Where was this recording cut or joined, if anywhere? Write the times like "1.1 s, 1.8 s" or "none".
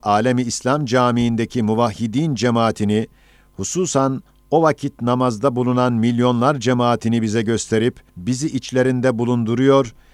8.1 s